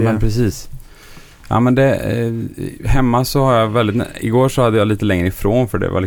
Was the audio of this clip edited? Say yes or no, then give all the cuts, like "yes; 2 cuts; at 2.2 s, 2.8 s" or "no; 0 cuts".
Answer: no; 0 cuts